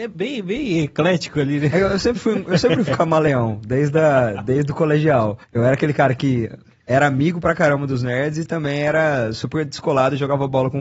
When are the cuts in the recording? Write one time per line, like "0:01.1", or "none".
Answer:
0:02.9
0:05.4

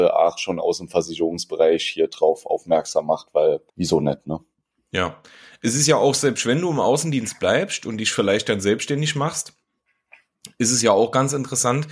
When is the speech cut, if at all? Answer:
0:03.7

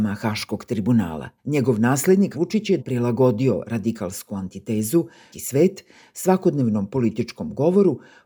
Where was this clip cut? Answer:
0:01.4
0:02.3
0:02.8
0:05.3

